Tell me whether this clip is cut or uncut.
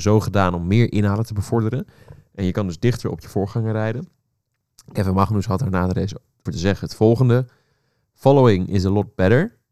cut